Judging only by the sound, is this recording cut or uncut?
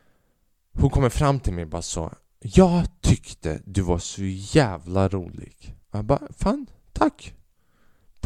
cut